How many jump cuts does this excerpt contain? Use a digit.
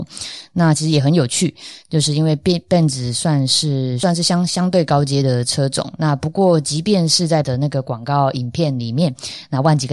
1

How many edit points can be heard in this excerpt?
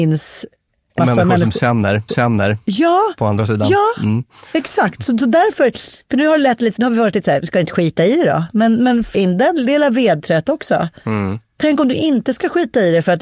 4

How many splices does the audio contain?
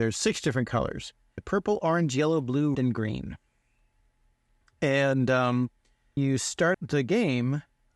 4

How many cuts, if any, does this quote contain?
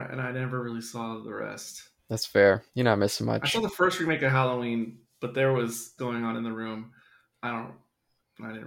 4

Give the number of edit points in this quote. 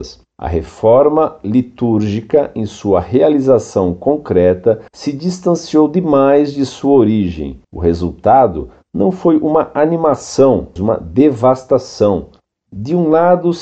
3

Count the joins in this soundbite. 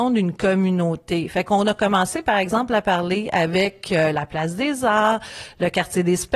0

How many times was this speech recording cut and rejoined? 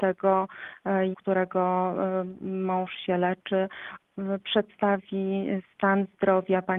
1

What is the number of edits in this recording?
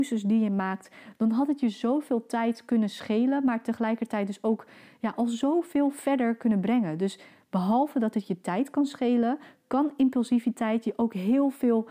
0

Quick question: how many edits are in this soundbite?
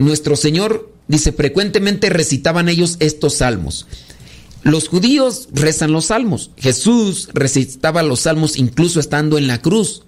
2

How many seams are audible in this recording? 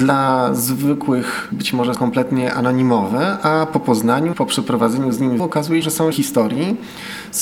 6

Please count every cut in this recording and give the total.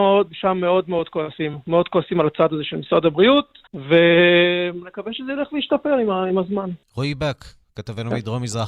2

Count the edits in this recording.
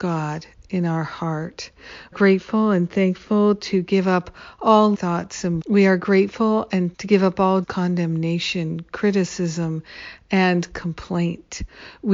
5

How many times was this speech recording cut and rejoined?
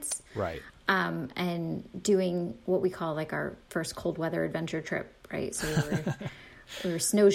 0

